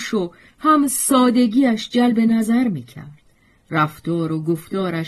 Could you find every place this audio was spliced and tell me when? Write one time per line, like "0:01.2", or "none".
none